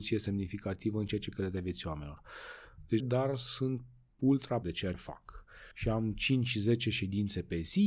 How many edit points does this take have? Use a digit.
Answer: 5